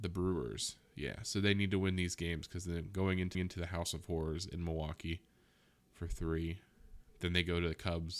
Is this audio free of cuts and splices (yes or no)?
no